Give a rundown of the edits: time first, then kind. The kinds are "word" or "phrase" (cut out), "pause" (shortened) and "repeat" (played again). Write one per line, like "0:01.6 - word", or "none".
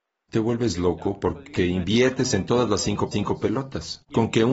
0:03.1 - repeat